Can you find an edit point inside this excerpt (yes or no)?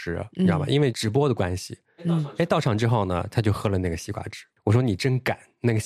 no